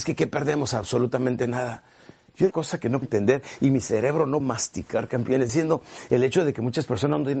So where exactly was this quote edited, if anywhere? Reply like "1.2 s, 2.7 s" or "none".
2.5 s, 3.0 s, 4.4 s, 5.5 s